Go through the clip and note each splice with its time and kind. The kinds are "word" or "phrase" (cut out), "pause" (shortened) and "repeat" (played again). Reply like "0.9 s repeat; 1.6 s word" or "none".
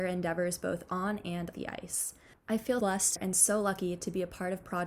1.5 s word; 2.8 s word; 3.2 s phrase